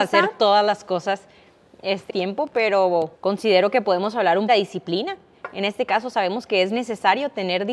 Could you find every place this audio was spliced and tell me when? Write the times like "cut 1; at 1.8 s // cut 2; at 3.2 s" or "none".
cut 1; at 2.1 s // cut 2; at 3.1 s // cut 3; at 4.5 s